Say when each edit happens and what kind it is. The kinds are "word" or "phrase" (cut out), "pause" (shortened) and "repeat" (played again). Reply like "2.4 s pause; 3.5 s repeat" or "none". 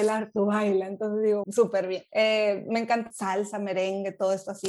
1.4 s word; 2.1 s pause; 3.1 s word